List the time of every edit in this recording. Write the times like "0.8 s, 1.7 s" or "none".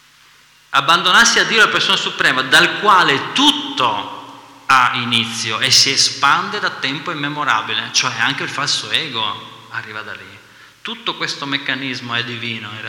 none